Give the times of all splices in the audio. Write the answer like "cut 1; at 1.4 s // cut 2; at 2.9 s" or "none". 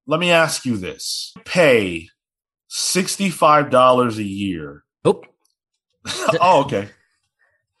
cut 1; at 1.4 s // cut 2; at 4.9 s